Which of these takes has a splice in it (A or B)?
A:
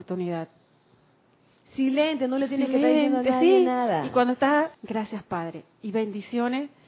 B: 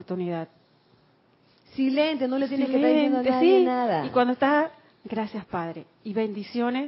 A